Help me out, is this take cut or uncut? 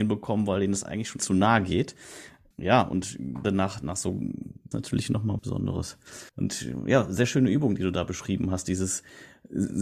cut